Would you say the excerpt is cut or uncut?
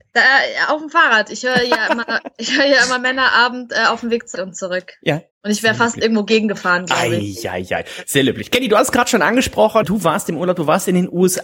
cut